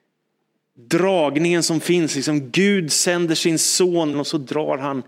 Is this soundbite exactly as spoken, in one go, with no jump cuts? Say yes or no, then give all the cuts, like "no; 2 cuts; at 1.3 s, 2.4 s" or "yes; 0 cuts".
no; 1 cut; at 4.1 s